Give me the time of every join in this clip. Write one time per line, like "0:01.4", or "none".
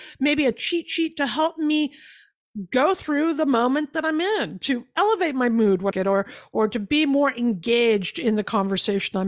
0:05.9